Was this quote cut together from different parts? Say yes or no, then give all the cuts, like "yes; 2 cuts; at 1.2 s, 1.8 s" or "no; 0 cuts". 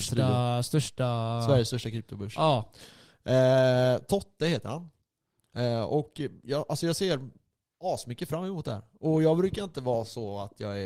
no; 0 cuts